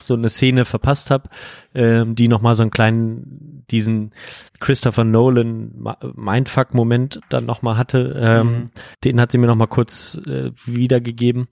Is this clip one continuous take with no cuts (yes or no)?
no